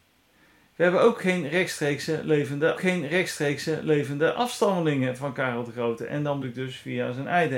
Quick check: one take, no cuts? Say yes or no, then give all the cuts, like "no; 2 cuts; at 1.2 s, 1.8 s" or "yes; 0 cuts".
no; 2 cuts; at 2.7 s, 6.4 s